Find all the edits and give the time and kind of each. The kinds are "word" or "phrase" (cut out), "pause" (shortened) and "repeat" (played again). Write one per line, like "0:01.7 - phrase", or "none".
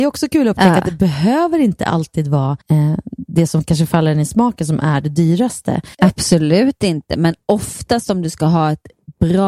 0:02.6 - pause
0:05.9 - pause